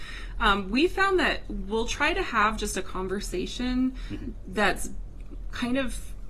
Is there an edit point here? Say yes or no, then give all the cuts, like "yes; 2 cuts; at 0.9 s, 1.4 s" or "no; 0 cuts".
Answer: no; 0 cuts